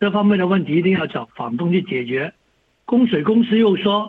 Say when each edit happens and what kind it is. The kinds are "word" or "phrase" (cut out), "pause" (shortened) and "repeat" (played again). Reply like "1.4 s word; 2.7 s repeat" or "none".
none